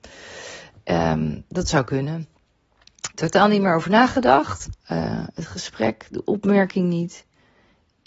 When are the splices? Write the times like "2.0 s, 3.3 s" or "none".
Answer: 3.1 s, 4.8 s